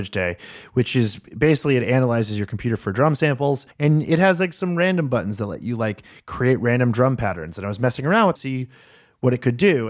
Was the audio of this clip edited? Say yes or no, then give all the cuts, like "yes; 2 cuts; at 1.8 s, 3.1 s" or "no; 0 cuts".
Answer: yes; 2 cuts; at 3.7 s, 8.4 s